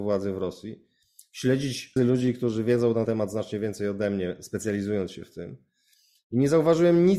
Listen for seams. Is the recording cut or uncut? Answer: cut